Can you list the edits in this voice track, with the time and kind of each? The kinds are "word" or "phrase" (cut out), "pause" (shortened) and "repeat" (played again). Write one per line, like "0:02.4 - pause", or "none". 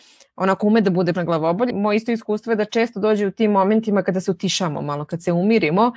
0:01.1 - word
0:01.7 - word